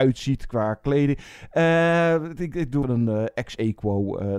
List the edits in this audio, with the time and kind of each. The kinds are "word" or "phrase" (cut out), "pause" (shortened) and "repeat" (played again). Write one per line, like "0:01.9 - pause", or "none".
0:02.8 - word

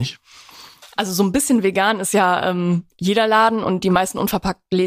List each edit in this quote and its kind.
none

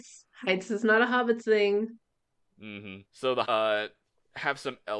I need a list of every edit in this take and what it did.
0:03.1 - pause
0:03.4 - word

